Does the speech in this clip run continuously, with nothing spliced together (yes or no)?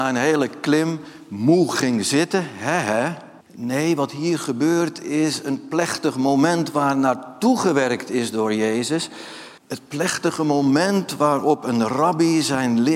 no